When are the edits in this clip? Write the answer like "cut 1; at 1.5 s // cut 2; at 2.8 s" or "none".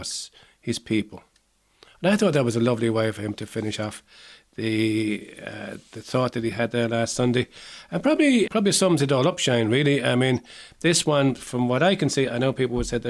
cut 1; at 8.5 s